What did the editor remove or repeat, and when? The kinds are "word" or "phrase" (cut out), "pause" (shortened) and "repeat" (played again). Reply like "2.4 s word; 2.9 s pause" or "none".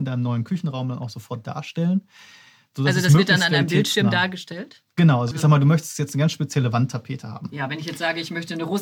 5.3 s word